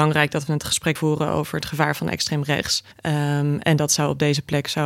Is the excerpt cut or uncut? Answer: cut